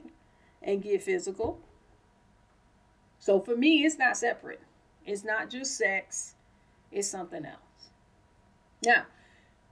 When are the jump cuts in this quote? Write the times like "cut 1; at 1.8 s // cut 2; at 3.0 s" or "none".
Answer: none